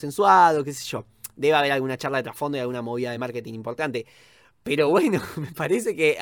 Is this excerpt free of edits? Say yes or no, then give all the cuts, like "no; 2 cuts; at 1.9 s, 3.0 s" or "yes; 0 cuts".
yes; 0 cuts